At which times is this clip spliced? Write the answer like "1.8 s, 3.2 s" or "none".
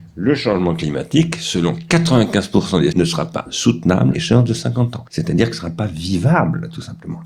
2.9 s, 4.1 s, 5.1 s